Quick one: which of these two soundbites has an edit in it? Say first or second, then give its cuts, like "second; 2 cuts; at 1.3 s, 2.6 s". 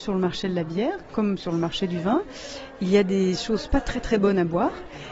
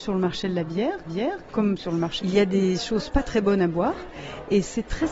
second; 3 cuts; at 1.0 s, 2.2 s, 3.2 s